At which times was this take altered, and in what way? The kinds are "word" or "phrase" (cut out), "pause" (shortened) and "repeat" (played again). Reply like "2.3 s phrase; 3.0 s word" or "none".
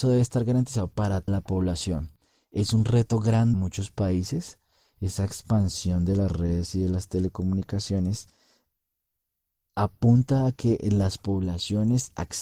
1.3 s word; 3.5 s word